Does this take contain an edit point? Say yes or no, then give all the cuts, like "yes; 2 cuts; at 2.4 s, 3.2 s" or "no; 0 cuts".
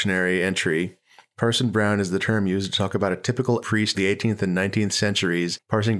yes; 2 cuts; at 3.6 s, 3.9 s